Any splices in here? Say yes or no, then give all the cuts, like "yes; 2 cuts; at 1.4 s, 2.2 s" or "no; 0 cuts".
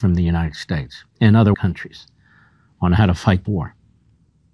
yes; 3 cuts; at 1.1 s, 1.5 s, 3.4 s